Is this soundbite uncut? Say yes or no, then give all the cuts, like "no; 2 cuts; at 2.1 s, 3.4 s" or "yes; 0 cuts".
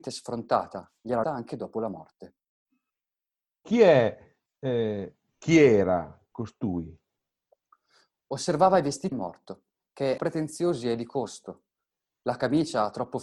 no; 3 cuts; at 1.2 s, 9.1 s, 10.2 s